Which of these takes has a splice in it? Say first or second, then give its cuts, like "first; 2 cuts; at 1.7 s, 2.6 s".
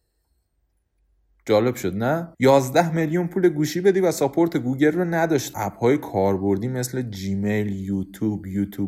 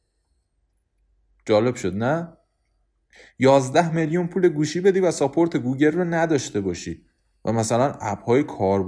first; 2 cuts; at 2.3 s, 5.5 s